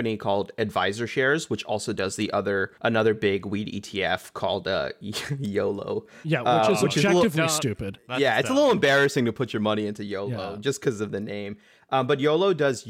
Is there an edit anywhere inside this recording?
yes; 1 cut; at 2.8 s

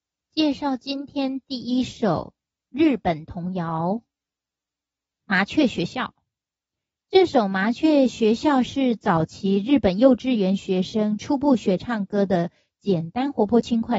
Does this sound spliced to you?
no; 0 cuts

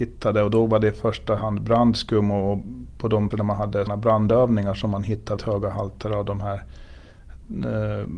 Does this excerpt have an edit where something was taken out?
yes; 3 cuts; at 3.3 s, 3.9 s, 5.4 s

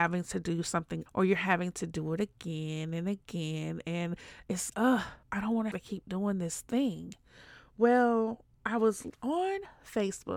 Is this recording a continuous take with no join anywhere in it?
no; 5 cuts; at 1.1 s, 4.7 s, 5.2 s, 5.7 s, 8.5 s

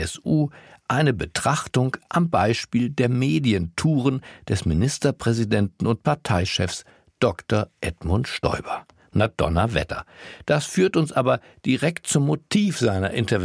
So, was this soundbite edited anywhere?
no; 0 cuts

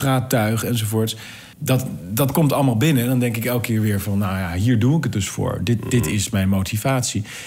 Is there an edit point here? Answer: yes; 1 cut; at 1.5 s

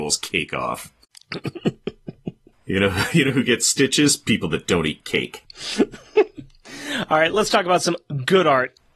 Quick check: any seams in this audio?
no; 0 cuts

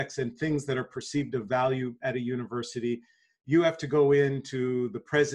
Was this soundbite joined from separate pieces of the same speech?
no; 0 cuts

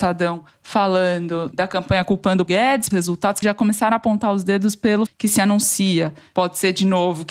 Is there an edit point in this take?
yes; 5 cuts; at 1.5 s, 2.5 s, 2.9 s, 3.4 s, 5.1 s

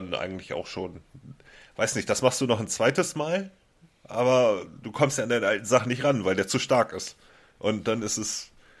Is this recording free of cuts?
yes; 0 cuts

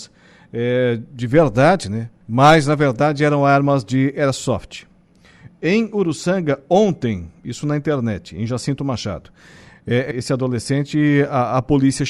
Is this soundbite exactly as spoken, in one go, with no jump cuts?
no; 2 cuts; at 2.2 s, 10.1 s

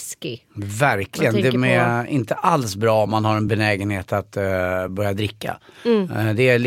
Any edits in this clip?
no; 0 cuts

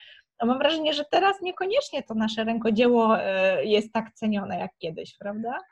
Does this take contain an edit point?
no; 0 cuts

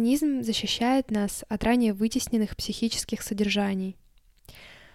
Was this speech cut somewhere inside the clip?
no; 0 cuts

